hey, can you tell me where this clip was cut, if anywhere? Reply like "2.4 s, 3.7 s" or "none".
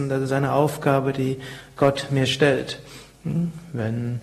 none